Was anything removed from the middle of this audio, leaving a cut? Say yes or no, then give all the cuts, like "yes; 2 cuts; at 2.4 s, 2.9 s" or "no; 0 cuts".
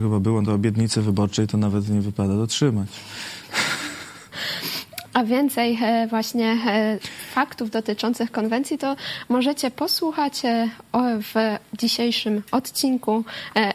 no; 0 cuts